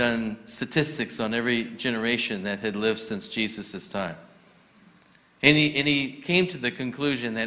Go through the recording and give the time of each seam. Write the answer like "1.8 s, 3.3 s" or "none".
none